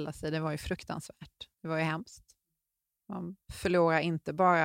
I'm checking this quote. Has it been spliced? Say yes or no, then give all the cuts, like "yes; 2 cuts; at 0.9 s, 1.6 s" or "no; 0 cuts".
yes; 2 cuts; at 1.5 s, 3.4 s